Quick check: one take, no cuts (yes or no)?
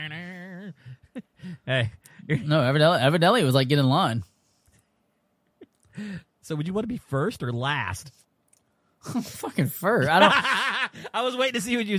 no